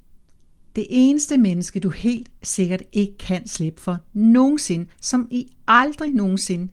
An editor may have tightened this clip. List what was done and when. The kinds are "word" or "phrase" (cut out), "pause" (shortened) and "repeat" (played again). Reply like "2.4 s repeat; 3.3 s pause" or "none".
none